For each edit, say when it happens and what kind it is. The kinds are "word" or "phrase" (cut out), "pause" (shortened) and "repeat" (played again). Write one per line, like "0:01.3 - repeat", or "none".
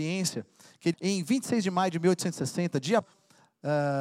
0:00.9 - phrase
0:03.0 - word